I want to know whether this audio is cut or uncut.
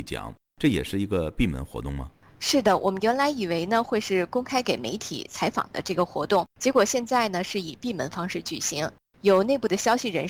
uncut